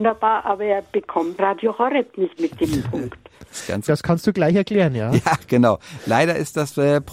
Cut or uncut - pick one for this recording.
cut